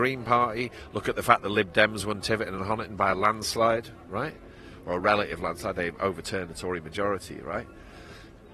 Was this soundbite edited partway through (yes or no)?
no